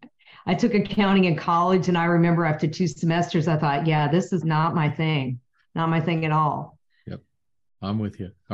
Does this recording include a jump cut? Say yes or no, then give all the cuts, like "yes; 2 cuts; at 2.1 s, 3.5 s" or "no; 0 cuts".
yes; 1 cut; at 4.4 s